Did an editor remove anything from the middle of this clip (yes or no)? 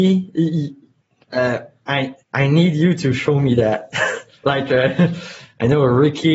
yes